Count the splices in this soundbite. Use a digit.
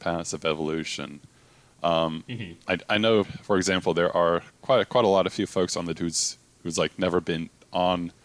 2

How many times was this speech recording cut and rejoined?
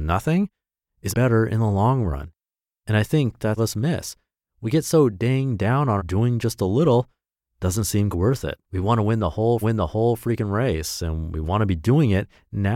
6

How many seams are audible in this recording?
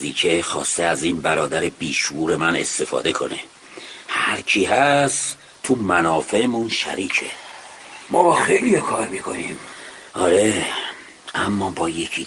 0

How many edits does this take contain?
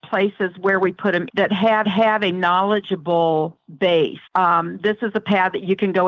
3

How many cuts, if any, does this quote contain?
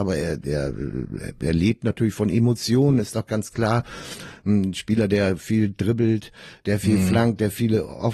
0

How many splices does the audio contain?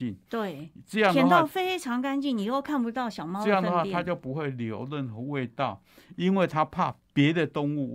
0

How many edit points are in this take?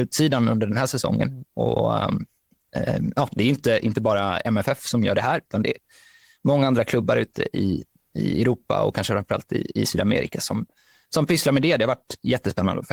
0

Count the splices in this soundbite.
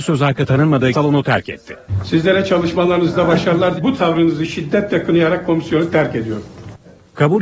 2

